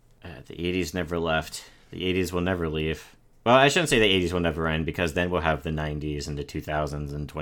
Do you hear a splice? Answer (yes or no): no